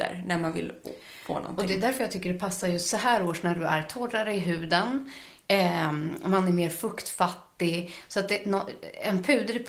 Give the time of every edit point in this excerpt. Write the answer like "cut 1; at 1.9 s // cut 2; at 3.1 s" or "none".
none